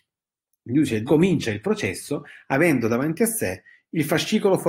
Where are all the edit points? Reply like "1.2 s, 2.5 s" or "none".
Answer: 1.1 s